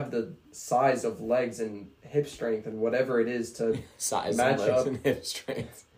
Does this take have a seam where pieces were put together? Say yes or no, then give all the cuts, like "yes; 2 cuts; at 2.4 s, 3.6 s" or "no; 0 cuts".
no; 0 cuts